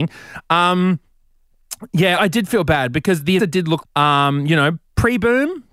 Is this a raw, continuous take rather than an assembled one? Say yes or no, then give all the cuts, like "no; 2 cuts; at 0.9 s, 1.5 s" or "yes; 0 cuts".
no; 3 cuts; at 2.2 s, 3.4 s, 3.8 s